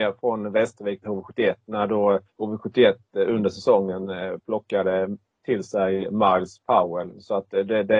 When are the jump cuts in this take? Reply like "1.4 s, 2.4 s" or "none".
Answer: 1.0 s, 2.3 s